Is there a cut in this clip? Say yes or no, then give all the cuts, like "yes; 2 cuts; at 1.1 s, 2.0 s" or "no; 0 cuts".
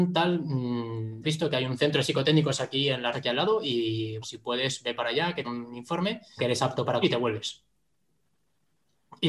yes; 6 cuts; at 1.2 s, 3.1 s, 4.2 s, 5.4 s, 6.4 s, 7.0 s